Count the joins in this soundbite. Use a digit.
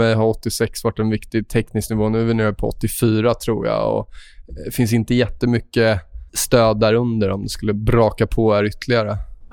1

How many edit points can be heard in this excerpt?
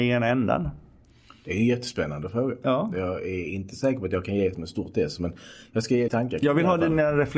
2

